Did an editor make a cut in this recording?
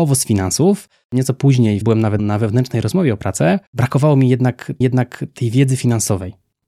yes; 4 cuts; at 1.8 s, 2.2 s, 3.7 s, 4.8 s

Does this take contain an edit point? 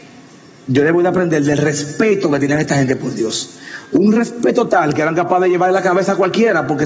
no; 0 cuts

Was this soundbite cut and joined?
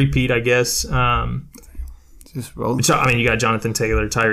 no; 0 cuts

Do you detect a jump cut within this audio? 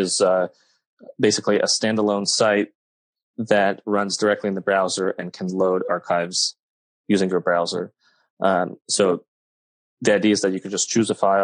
no; 0 cuts

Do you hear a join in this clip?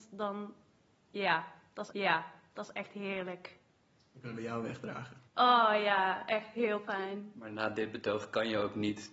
yes; 2 cuts; at 1.9 s, 5.3 s

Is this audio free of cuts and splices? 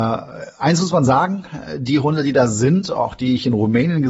yes; 0 cuts

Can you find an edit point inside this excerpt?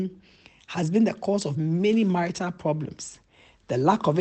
no; 0 cuts

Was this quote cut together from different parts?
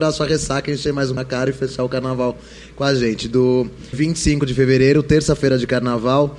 yes; 2 cuts; at 1.2 s, 3.9 s

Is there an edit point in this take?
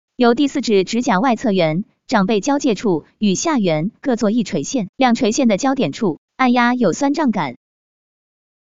yes; 2 cuts; at 4.9 s, 6.2 s

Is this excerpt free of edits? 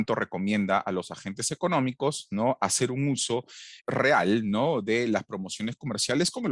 yes; 0 cuts

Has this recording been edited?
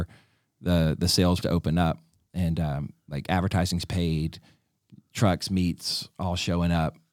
yes; 1 cut; at 1.4 s

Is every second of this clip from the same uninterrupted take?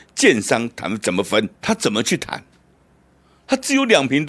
no; 1 cut; at 1.5 s

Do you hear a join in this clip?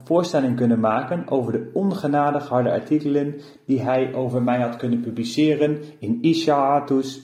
no; 0 cuts

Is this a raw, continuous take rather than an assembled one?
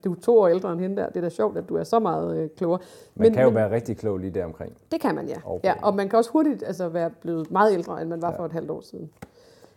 yes; 0 cuts

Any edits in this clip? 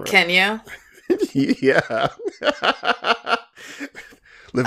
no; 0 cuts

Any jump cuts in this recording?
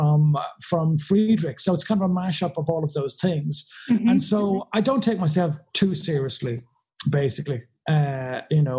no; 0 cuts

